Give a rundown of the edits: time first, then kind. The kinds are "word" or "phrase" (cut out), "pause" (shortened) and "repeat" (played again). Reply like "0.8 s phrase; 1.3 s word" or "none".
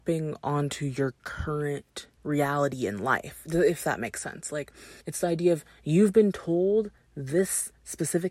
2.2 s pause; 5.0 s pause